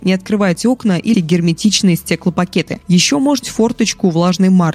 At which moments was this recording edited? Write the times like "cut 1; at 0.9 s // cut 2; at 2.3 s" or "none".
cut 1; at 1.1 s // cut 2; at 3.4 s